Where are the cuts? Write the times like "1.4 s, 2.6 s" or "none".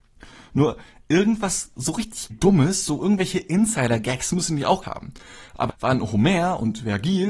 2.3 s, 3.0 s, 4.8 s, 5.7 s